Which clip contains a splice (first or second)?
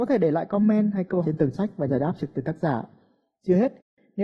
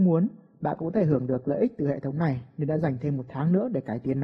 first